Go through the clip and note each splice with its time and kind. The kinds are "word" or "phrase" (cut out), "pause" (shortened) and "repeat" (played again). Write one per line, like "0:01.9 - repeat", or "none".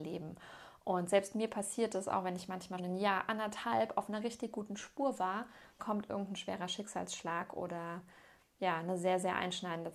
0:02.8 - word
0:05.8 - word